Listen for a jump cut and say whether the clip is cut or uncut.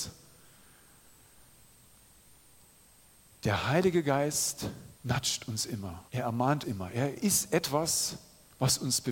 cut